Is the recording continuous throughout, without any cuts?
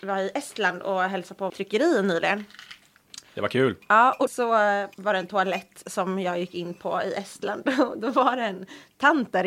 no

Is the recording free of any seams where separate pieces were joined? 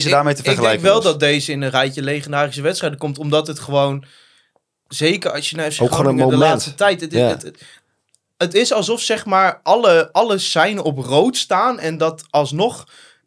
yes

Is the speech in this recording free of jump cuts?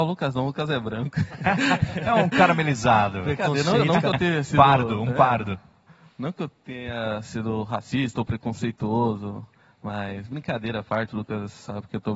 yes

